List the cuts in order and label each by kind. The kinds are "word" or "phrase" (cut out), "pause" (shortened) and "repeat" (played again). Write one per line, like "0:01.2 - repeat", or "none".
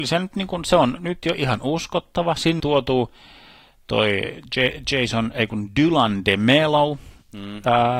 0:02.6 - word